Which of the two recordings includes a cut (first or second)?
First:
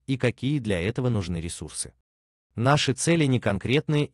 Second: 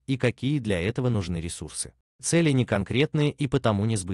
second